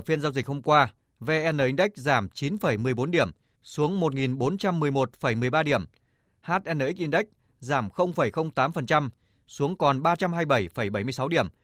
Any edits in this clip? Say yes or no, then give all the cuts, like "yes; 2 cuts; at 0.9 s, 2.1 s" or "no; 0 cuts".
no; 0 cuts